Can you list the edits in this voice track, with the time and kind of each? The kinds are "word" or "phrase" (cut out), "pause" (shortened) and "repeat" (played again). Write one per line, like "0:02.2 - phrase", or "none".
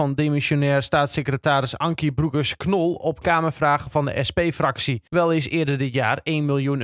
0:05.1 - pause